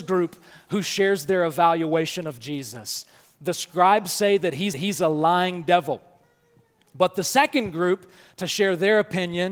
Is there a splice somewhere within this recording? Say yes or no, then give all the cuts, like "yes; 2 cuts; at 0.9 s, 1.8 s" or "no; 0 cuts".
yes; 1 cut; at 4.7 s